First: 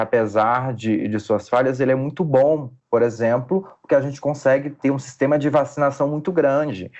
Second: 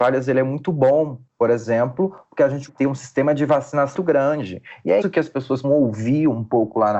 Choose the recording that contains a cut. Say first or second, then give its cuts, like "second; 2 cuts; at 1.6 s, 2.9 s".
second; 4 cuts; at 2.7 s, 3.9 s, 5.0 s, 5.6 s